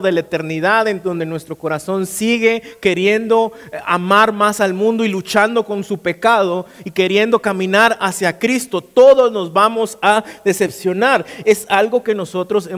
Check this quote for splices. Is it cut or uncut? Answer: uncut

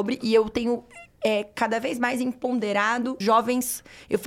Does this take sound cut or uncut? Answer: cut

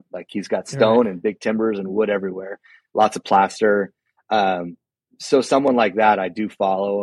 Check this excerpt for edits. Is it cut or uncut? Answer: uncut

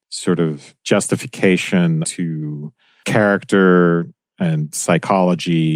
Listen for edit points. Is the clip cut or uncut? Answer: cut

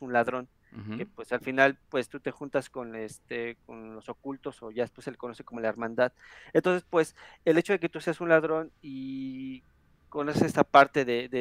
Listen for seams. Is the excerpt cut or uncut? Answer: uncut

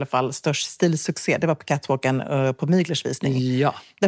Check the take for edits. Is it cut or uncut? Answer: uncut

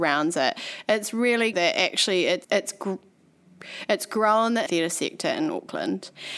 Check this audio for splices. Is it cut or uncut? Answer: cut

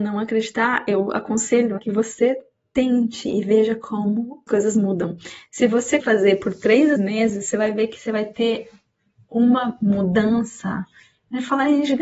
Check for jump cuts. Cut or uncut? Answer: cut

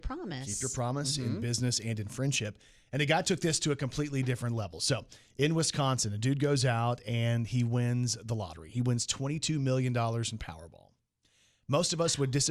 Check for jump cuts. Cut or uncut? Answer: uncut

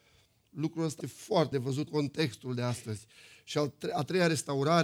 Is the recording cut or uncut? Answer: cut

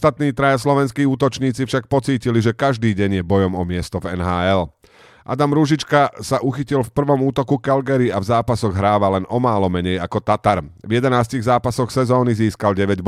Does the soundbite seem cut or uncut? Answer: uncut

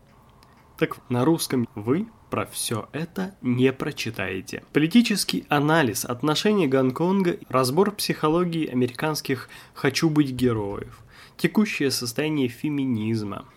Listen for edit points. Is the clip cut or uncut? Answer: cut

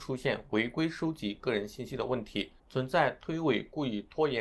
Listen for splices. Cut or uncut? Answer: uncut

